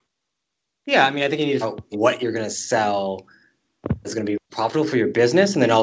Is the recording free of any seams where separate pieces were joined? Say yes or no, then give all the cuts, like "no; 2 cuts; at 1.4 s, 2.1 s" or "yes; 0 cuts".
no; 4 cuts; at 1.6 s, 1.9 s, 4.0 s, 4.5 s